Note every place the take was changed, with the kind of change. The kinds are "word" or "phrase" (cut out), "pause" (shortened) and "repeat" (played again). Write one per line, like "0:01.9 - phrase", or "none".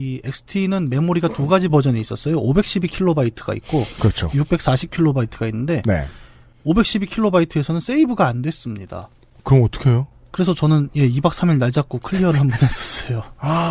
none